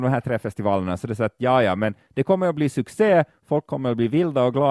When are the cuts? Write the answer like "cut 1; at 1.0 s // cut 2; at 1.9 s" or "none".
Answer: none